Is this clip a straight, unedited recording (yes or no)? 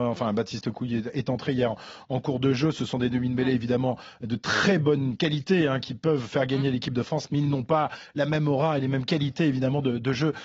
yes